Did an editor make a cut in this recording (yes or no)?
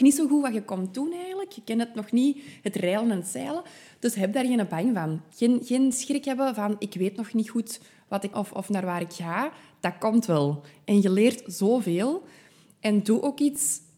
yes